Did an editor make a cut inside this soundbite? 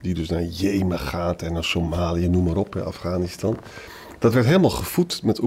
no; 0 cuts

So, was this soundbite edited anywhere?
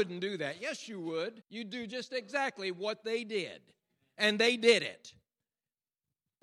yes; 1 cut; at 1.4 s

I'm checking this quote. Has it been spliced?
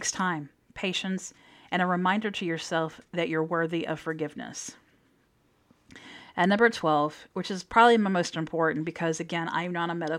no; 0 cuts

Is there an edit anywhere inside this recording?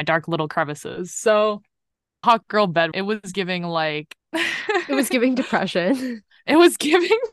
yes; 3 cuts; at 2.2 s, 2.9 s, 4.2 s

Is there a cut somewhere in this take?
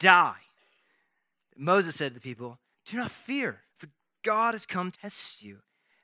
yes; 3 cuts; at 2.7 s, 3.7 s, 4.9 s

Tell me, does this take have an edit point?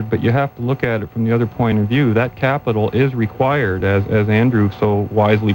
no; 0 cuts

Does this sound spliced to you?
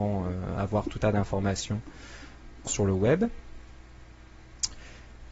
yes; 2 cuts; at 1.0 s, 2.7 s

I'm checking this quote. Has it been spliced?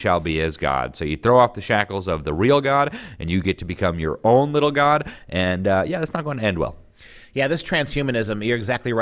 no; 0 cuts

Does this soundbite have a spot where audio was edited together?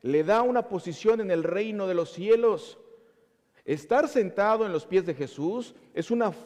no; 0 cuts

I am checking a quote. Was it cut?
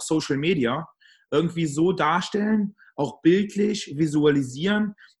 no; 0 cuts

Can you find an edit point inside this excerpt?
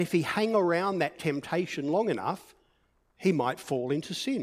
no; 0 cuts

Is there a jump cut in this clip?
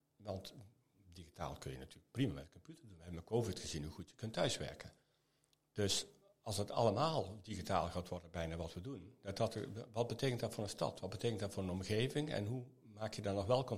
no; 0 cuts

